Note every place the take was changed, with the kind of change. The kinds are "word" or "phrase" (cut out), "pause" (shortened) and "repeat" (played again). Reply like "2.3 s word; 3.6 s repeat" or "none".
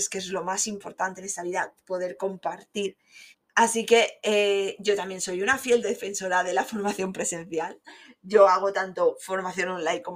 3.3 s pause